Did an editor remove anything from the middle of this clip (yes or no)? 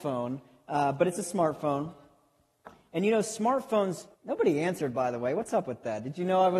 yes